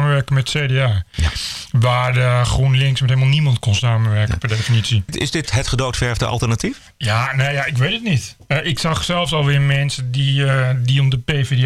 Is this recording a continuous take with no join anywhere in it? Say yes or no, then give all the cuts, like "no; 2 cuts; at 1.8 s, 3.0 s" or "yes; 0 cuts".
yes; 0 cuts